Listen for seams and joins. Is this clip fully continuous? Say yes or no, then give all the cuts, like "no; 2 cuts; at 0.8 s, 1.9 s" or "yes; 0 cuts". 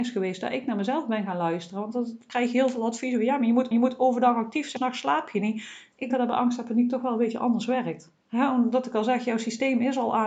no; 4 cuts; at 3.7 s, 4.8 s, 6.1 s, 8.2 s